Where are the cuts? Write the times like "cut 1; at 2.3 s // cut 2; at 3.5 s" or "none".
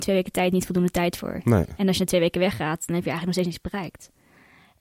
none

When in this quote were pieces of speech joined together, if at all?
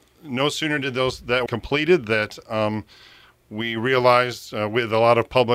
cut 1; at 1.5 s

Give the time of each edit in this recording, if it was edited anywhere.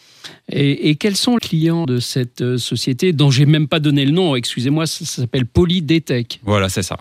cut 1; at 1.4 s // cut 2; at 1.8 s

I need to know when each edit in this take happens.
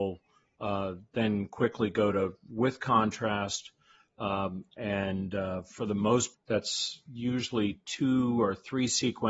cut 1; at 6.3 s

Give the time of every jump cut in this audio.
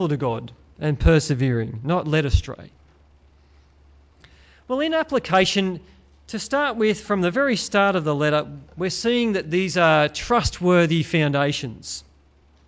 none

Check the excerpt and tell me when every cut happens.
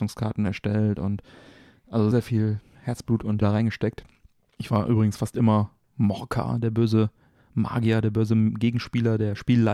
cut 1; at 2.1 s // cut 2; at 3.4 s

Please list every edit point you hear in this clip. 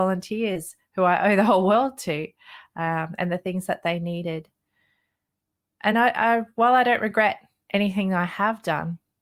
none

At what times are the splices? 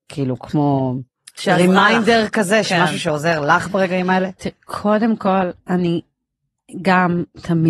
cut 1; at 5.6 s

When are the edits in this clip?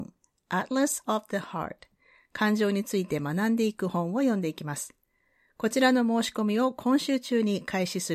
none

